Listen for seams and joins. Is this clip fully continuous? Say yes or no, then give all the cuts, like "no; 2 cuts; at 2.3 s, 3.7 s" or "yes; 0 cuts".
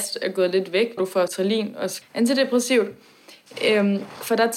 no; 3 cuts; at 1.0 s, 1.3 s, 2.0 s